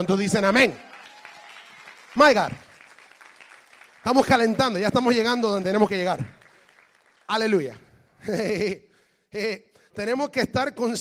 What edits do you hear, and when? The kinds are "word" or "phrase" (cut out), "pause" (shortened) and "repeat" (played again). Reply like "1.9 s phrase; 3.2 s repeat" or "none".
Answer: none